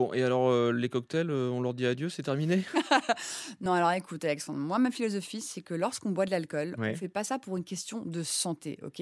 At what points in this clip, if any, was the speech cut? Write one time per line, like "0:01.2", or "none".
none